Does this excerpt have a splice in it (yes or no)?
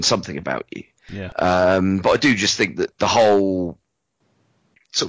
yes